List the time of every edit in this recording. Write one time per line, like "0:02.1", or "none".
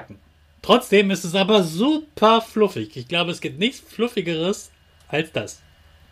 none